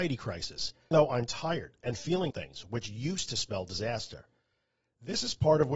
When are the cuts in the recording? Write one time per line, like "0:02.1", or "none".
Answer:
0:00.9
0:02.3